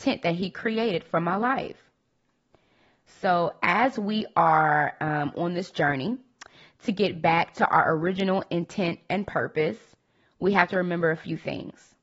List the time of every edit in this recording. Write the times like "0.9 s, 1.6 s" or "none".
none